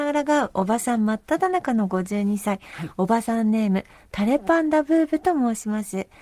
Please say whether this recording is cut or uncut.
uncut